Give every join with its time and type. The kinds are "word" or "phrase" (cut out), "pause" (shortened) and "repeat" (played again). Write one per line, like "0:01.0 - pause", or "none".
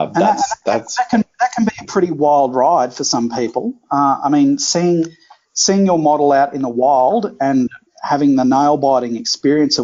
none